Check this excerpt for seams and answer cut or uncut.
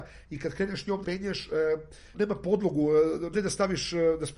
cut